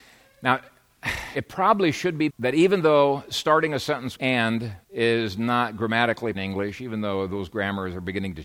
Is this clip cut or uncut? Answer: cut